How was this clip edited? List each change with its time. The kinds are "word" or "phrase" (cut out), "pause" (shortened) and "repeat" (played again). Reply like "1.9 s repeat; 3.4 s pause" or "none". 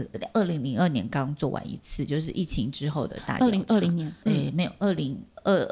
none